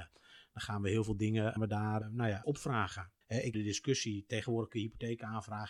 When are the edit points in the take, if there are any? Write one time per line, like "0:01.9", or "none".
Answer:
0:01.6
0:02.0
0:02.4
0:03.2
0:03.5